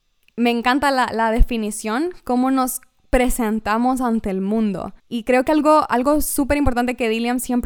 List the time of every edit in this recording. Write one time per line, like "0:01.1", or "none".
0:05.0